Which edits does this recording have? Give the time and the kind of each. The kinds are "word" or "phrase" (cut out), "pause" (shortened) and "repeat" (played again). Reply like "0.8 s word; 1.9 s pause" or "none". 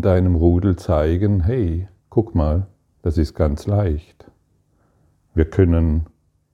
2.0 s pause; 2.9 s pause